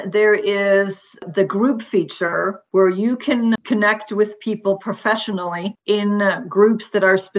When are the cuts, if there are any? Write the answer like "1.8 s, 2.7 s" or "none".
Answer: 3.6 s